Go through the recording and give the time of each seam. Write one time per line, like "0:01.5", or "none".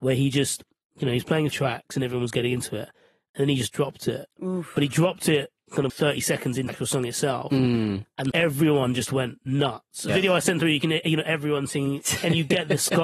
0:01.5
0:05.9
0:06.7
0:08.3
0:10.1